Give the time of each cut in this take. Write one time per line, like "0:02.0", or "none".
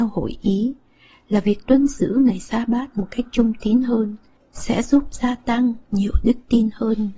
0:04.4